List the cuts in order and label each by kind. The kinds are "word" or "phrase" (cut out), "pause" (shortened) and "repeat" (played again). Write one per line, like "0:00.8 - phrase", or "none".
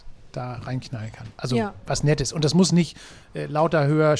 none